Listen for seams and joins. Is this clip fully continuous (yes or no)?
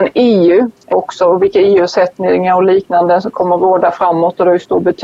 no